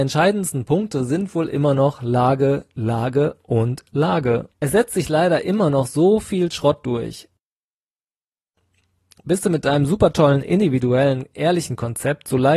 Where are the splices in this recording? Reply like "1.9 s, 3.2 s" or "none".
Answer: 4.5 s